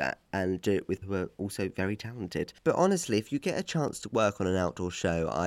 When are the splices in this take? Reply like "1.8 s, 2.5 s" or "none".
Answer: 1.0 s, 2.6 s